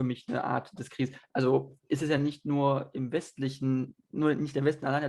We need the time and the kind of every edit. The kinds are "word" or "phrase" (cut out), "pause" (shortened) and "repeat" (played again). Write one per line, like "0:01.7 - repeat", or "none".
none